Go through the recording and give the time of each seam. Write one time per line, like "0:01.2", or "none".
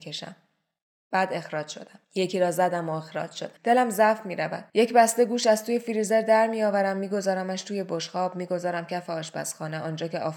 0:02.0
0:03.6
0:04.7